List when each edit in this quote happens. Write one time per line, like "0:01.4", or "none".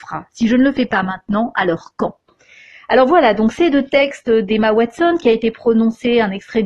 none